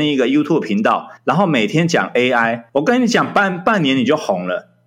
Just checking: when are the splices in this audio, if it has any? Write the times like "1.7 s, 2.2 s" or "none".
1.2 s, 2.7 s